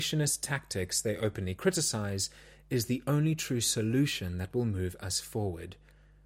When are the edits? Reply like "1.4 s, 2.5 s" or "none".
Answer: none

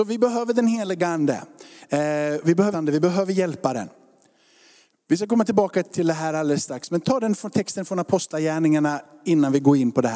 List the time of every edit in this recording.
2.7 s, 5.8 s

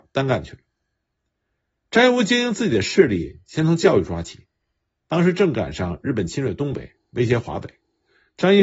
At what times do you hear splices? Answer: none

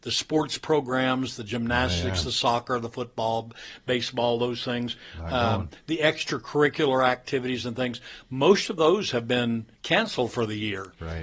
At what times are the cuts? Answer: 9.7 s

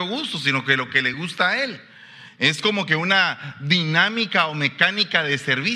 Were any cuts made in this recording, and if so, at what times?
none

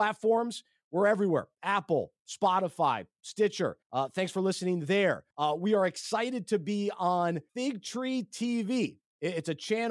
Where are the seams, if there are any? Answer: 3.8 s, 5.3 s, 7.5 s

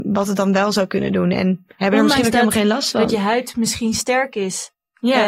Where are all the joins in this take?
none

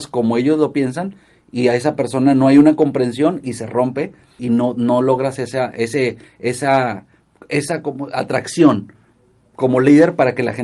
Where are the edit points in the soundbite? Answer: 4.4 s

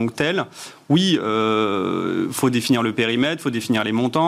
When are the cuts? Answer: none

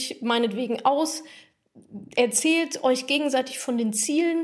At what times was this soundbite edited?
none

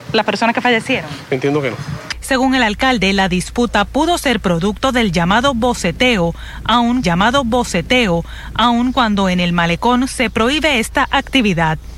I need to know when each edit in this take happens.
7.0 s

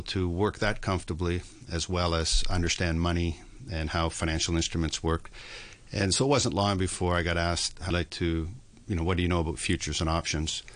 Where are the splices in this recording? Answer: 7.9 s

